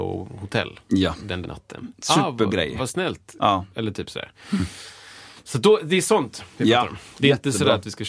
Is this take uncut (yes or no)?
no